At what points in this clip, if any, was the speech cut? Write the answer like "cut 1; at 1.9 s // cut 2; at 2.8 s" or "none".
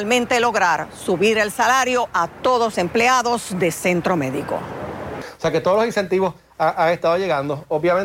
cut 1; at 2.7 s